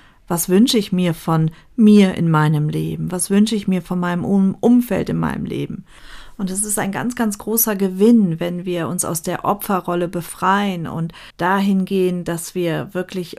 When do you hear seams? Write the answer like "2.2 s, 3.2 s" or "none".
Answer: 11.3 s